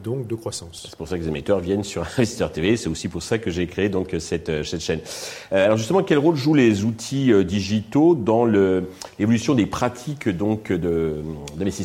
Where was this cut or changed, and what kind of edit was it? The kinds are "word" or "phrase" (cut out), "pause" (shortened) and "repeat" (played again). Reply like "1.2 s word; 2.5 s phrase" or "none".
none